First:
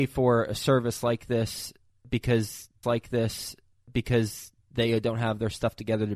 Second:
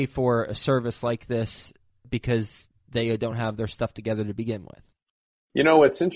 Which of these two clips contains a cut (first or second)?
first